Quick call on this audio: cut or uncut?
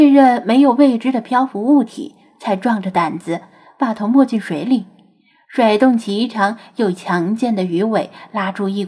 uncut